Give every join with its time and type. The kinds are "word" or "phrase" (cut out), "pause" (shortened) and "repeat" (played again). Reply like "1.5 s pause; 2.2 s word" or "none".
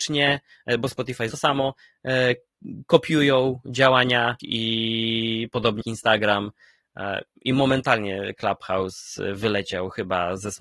1.3 s phrase; 4.4 s word; 5.8 s word

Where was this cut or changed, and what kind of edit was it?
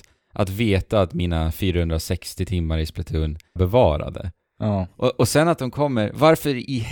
3.6 s phrase

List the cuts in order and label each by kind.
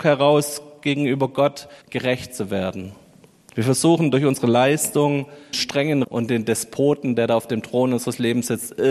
1.8 s pause; 5.5 s word; 6.0 s word

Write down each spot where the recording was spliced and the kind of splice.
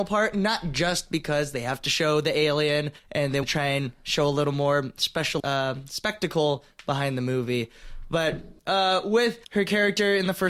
3.0 s pause; 3.4 s word; 5.4 s word; 8.6 s pause; 9.4 s pause

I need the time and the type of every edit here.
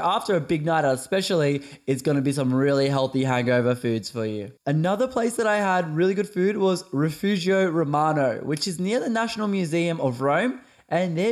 4.6 s pause

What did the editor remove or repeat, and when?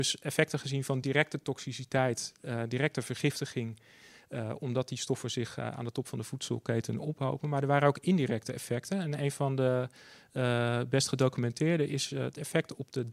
none

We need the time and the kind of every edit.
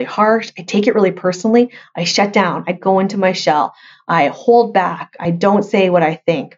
none

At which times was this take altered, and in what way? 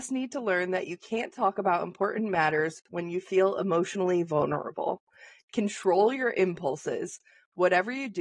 none

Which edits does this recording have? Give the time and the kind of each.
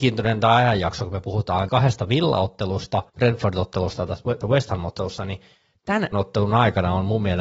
1.7 s word; 3.1 s pause; 4.4 s word; 6.1 s word

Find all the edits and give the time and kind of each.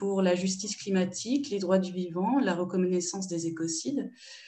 none

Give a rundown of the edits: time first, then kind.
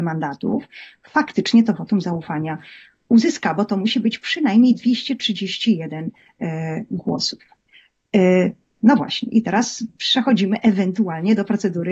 none

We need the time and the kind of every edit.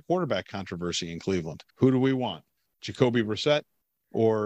1.7 s pause

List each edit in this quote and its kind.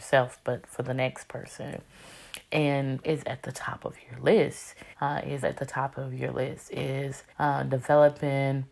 3.0 s word; 4.9 s pause; 5.4 s word; 7.3 s pause

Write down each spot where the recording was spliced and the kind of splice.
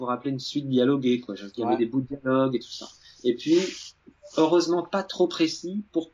none

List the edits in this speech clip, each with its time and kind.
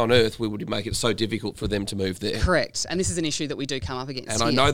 none

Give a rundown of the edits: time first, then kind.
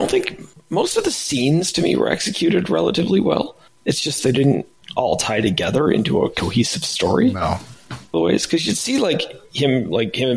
8.1 s phrase

